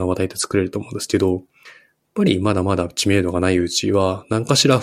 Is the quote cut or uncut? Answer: uncut